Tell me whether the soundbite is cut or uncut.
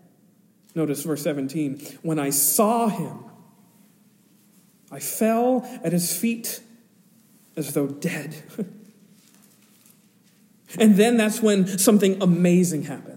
uncut